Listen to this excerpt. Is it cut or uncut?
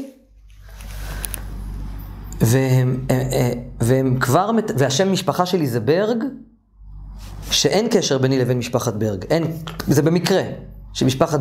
uncut